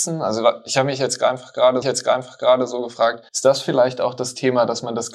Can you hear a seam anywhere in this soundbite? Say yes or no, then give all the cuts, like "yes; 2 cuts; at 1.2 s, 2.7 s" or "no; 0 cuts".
yes; 2 cuts; at 1.8 s, 3.3 s